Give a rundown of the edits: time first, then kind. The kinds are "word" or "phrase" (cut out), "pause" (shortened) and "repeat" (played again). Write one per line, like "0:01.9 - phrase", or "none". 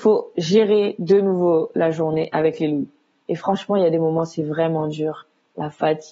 none